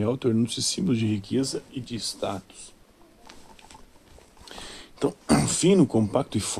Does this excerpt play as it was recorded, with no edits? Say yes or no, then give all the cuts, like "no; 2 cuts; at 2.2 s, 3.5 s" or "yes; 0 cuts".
yes; 0 cuts